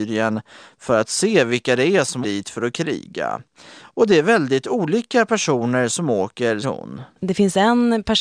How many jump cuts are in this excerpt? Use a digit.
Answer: 2